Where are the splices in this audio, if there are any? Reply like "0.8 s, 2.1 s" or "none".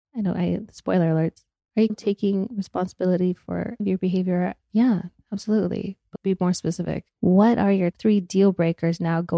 1.9 s, 3.8 s, 6.1 s, 7.9 s